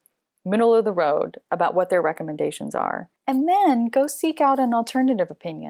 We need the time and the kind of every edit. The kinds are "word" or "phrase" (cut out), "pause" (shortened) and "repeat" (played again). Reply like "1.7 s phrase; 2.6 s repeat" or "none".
3.2 s pause